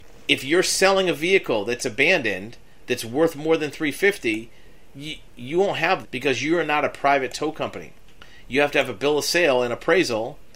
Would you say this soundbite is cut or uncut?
cut